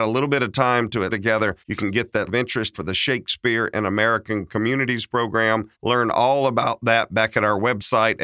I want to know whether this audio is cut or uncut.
cut